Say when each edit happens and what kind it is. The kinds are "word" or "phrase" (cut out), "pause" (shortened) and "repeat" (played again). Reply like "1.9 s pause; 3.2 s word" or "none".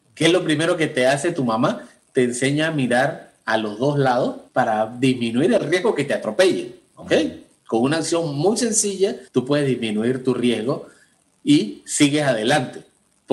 4.5 s pause; 9.3 s pause